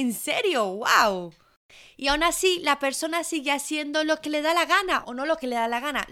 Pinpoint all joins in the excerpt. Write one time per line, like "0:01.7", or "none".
0:05.0